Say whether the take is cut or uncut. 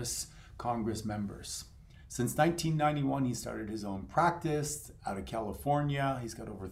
uncut